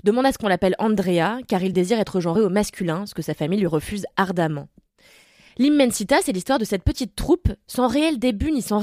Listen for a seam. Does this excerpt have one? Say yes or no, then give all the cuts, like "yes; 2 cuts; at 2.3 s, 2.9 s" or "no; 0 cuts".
no; 0 cuts